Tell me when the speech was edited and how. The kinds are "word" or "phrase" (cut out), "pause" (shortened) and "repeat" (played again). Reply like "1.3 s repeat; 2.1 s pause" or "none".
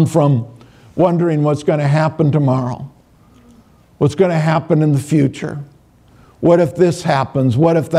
none